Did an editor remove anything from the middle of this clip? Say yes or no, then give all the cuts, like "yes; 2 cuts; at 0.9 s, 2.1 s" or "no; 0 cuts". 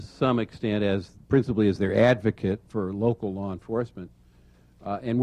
no; 0 cuts